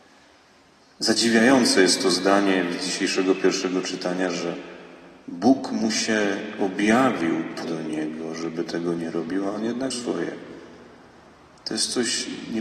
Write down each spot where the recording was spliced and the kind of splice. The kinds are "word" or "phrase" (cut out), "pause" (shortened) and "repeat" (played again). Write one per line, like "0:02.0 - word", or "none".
0:07.6 - word
0:09.9 - word